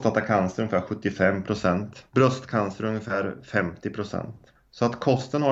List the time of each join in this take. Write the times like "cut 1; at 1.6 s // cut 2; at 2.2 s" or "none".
cut 1; at 2.1 s